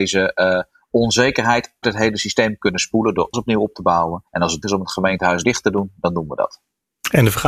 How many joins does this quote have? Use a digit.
5